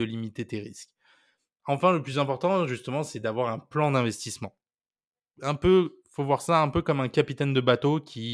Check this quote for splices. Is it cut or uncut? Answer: uncut